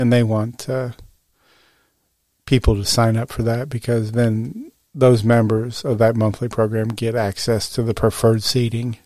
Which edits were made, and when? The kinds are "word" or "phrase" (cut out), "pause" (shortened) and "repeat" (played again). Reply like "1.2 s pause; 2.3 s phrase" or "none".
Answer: none